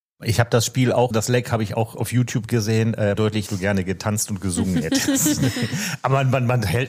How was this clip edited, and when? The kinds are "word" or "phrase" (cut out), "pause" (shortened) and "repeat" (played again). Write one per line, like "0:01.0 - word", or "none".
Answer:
0:01.1 - word
0:01.9 - word
0:03.2 - phrase
0:03.5 - phrase

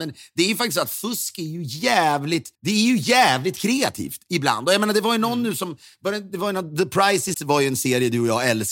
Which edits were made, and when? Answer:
0:02.5 - pause
0:07.3 - word

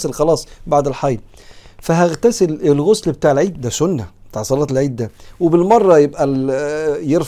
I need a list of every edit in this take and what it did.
none

